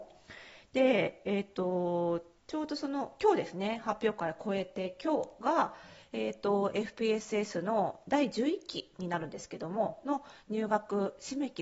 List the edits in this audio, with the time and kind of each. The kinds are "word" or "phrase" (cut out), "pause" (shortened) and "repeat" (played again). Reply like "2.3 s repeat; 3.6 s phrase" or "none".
2.4 s pause

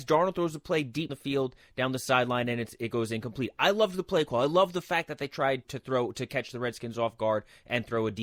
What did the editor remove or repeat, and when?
1.1 s word; 5.6 s word

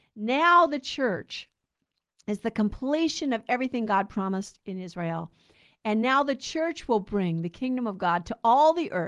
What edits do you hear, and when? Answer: none

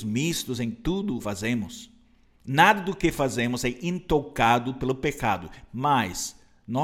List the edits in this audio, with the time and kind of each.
1.2 s phrase

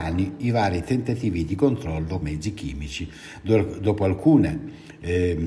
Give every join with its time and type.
2.2 s word

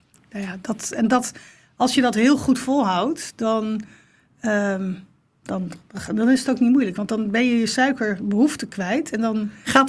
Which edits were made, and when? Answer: none

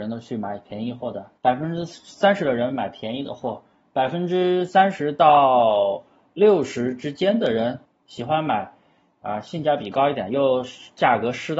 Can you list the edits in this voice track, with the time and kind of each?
1.4 s pause; 7.9 s pause

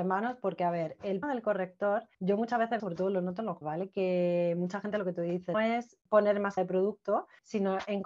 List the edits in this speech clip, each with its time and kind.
1.2 s word; 2.1 s pause; 2.8 s word; 3.6 s word; 5.5 s word; 6.6 s word

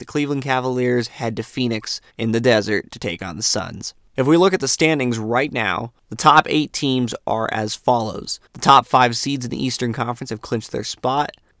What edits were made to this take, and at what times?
2.1 s pause; 8.5 s pause

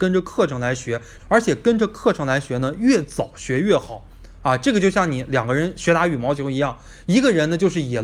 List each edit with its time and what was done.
1.2 s phrase

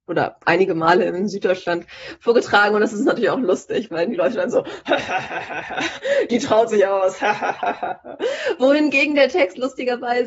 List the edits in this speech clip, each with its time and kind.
none

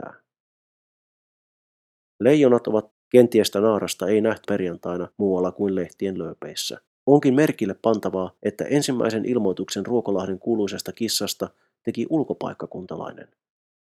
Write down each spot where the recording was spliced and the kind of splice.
2.9 s phrase; 3.5 s phrase; 4.4 s word; 5.1 s pause; 6.9 s pause; 8.4 s pause

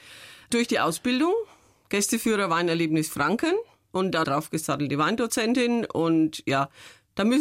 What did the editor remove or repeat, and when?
4.2 s word

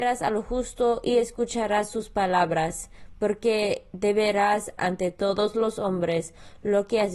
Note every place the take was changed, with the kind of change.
4.8 s word

